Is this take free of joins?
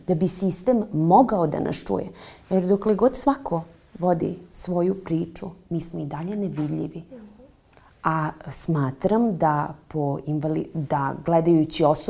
yes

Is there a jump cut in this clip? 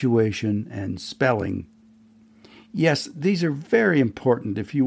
no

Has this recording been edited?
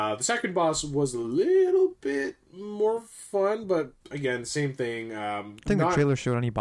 yes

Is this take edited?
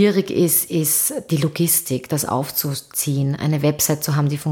no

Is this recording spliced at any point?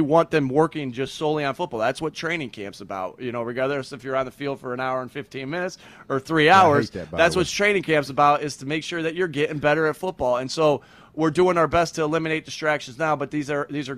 no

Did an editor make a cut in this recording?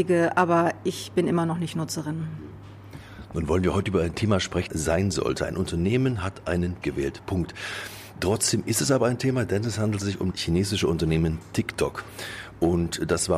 yes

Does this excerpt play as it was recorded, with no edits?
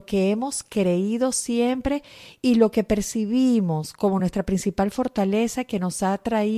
yes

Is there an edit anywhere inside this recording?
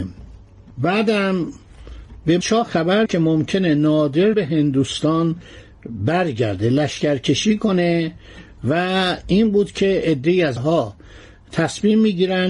yes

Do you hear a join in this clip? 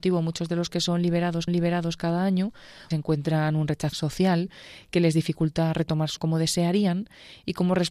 yes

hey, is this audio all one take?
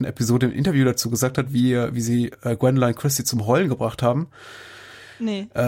yes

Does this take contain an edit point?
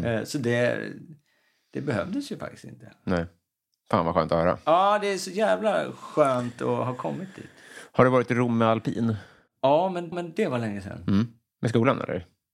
yes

